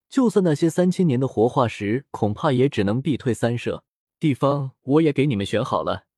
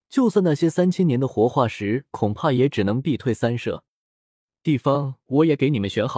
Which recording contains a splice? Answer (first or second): first